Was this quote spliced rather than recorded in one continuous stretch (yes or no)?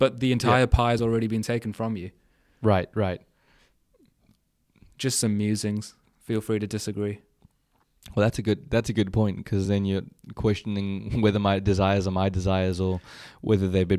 no